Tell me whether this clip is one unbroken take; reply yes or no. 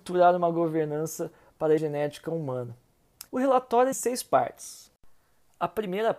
no